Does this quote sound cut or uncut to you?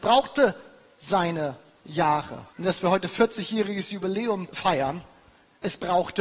cut